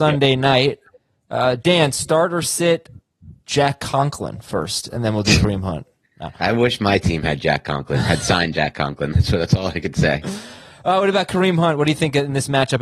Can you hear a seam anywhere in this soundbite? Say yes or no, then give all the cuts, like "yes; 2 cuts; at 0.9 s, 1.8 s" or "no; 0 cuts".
no; 0 cuts